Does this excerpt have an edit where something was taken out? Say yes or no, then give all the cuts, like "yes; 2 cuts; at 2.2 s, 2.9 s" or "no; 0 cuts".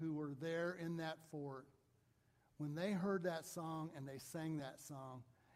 no; 0 cuts